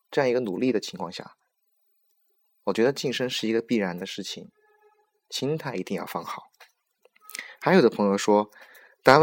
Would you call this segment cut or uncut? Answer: uncut